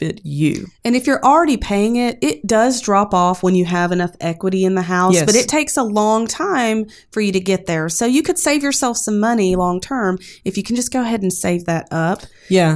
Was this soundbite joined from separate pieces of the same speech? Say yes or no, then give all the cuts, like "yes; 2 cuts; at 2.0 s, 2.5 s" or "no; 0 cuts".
no; 0 cuts